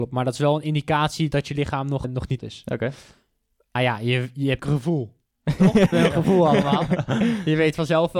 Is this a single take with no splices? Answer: no; 5 cuts; at 2.0 s, 2.4 s, 3.8 s, 4.6 s, 5.9 s

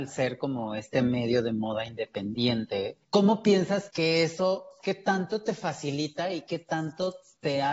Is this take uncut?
no; 2 cuts; at 3.0 s, 3.9 s

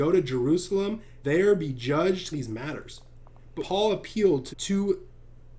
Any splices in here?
yes; 4 cuts; at 1.2 s, 2.3 s, 3.6 s, 4.5 s

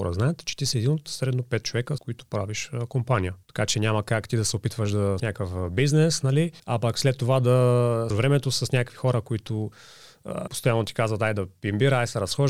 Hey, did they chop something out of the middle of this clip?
yes; 6 cuts; at 2.0 s, 3.4 s, 5.2 s, 6.6 s, 8.1 s, 10.5 s

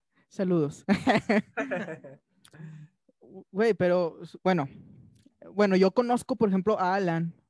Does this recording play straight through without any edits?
no; 1 cut; at 4.4 s

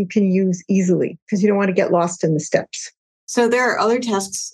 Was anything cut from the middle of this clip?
yes; 1 cut; at 3.1 s

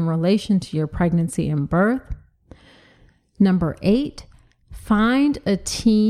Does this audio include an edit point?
no; 0 cuts

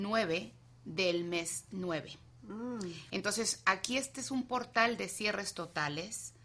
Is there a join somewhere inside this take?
no; 0 cuts

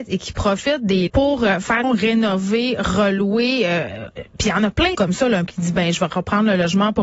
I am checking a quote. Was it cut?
yes; 4 cuts; at 1.1 s, 1.8 s, 4.9 s, 5.5 s

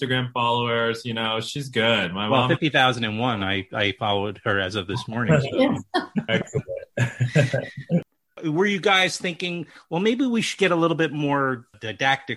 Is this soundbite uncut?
yes; 0 cuts

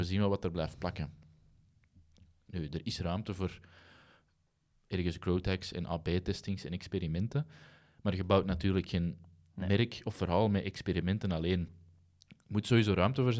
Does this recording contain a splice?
no; 0 cuts

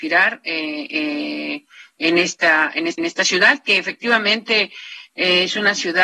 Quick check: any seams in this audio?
yes; 1 cut; at 3.0 s

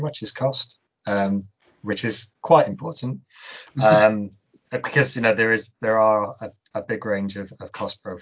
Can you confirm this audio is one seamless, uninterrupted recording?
yes; 0 cuts

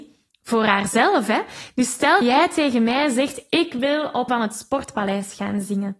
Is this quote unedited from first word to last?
no; 2 cuts; at 2.2 s, 4.3 s

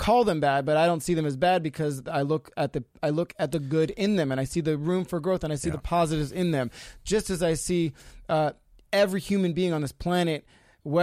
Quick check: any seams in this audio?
no; 0 cuts

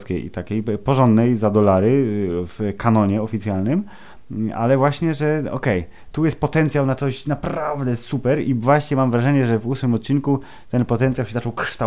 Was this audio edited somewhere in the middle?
no; 0 cuts

